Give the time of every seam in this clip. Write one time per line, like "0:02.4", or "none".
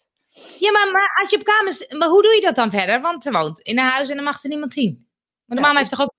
none